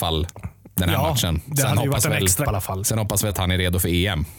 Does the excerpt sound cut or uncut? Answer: cut